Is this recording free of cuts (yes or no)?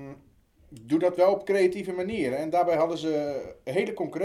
yes